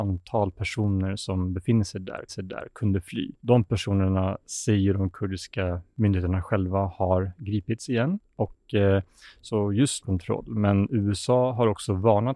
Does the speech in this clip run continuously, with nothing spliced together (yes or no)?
no